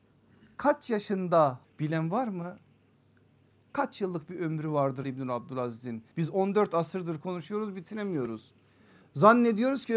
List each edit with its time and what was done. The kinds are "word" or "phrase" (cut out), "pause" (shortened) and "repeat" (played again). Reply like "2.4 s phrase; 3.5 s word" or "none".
1.6 s phrase; 5.0 s phrase; 6.1 s pause; 7.2 s word